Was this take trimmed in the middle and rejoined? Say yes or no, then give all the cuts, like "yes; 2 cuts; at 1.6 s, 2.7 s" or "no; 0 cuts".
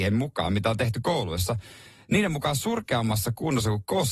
no; 0 cuts